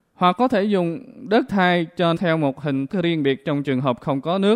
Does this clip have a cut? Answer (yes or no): yes